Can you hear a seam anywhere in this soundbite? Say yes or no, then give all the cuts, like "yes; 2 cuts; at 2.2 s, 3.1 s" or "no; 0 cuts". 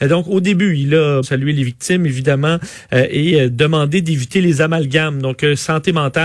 yes; 1 cut; at 1.2 s